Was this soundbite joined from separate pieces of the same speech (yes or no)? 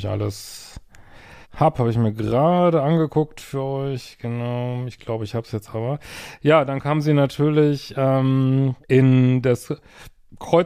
yes